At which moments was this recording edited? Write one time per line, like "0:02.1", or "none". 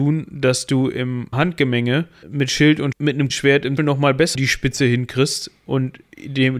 0:01.3
0:02.2
0:02.9
0:03.3
0:03.8
0:04.3